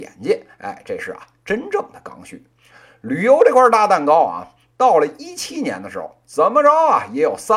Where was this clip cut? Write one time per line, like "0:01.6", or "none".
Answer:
none

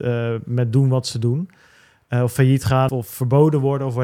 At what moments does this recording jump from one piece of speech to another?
0:02.9

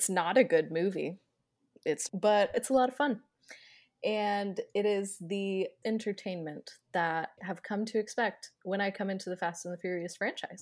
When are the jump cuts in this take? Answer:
0:02.1
0:02.5
0:05.8
0:07.4

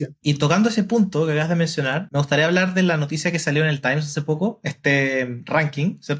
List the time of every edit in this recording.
none

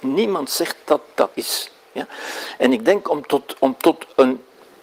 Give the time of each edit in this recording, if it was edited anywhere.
0:01.3

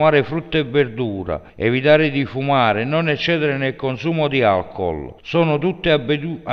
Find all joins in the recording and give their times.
0:01.5
0:05.2

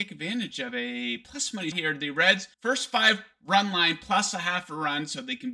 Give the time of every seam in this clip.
0:01.7
0:02.5

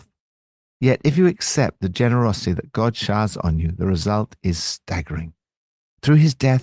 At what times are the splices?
none

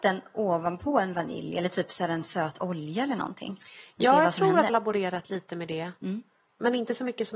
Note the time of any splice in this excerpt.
0:04.7

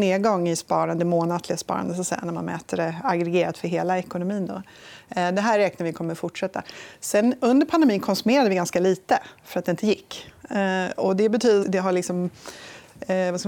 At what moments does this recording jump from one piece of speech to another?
0:11.6

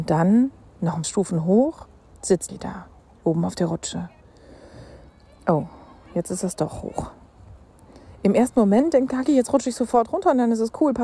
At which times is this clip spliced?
0:01.0
0:02.5
0:09.3

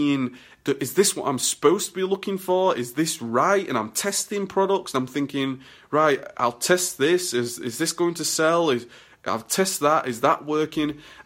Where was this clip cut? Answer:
none

